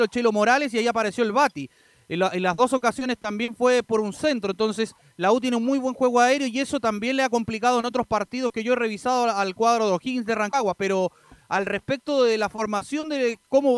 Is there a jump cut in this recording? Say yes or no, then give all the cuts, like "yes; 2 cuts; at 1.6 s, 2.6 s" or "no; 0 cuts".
no; 0 cuts